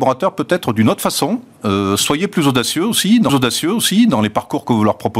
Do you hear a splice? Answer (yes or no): yes